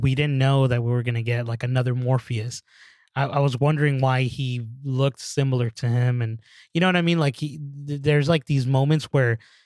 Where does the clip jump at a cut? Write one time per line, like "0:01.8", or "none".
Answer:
none